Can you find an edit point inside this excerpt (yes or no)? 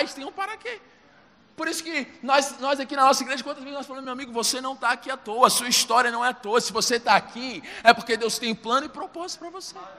no